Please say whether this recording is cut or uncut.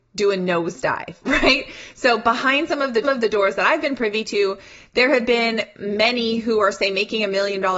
cut